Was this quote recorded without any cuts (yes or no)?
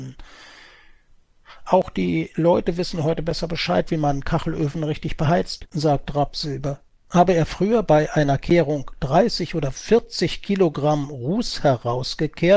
yes